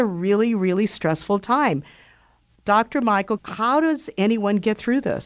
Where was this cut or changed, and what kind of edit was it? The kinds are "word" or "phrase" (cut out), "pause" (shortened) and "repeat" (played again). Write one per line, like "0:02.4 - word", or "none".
0:03.4 - word